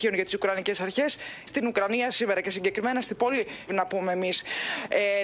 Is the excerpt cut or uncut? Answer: cut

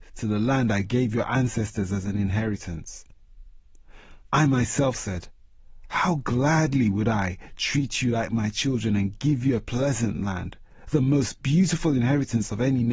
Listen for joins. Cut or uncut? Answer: cut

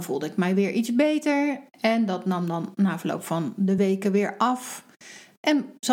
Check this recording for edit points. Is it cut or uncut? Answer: uncut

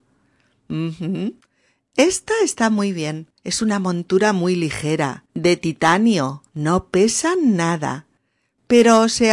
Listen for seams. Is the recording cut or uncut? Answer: cut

